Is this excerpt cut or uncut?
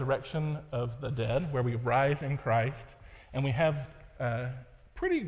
uncut